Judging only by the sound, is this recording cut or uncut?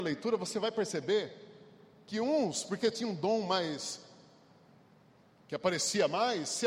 uncut